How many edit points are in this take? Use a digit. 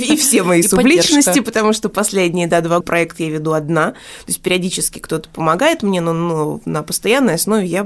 1